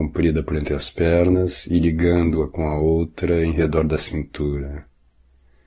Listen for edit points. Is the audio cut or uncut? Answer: uncut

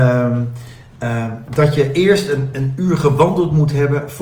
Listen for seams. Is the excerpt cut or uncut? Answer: uncut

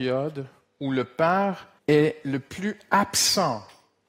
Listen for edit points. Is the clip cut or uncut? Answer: cut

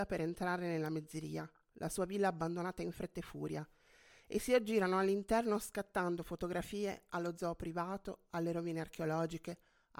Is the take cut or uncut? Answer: uncut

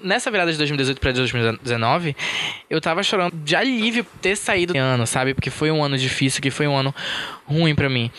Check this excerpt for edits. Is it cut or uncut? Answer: cut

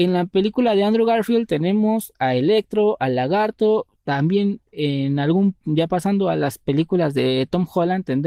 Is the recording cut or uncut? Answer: uncut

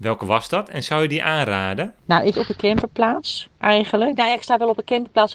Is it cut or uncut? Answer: cut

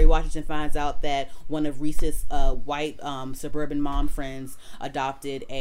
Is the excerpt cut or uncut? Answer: uncut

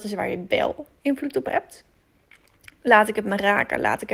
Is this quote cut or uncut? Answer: uncut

